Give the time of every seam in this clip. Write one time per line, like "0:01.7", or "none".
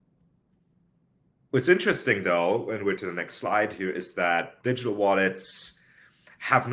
0:03.0
0:04.6